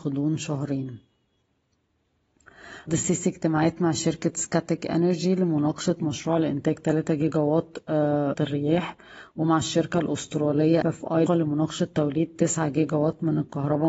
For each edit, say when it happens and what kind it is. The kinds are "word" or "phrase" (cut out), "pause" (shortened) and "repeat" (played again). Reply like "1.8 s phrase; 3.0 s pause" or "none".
2.9 s word; 6.0 s word; 8.3 s phrase; 10.8 s word; 11.3 s word